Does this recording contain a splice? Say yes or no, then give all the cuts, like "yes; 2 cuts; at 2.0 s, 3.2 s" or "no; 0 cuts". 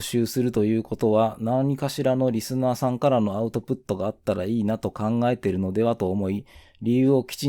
no; 0 cuts